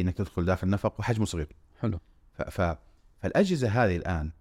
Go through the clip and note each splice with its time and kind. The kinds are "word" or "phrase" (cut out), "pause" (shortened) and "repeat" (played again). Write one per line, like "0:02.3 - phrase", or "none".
none